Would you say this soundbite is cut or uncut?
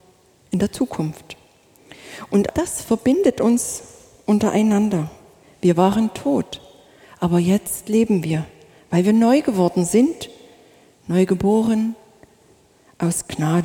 cut